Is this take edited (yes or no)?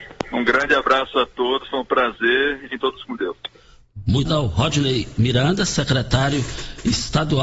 yes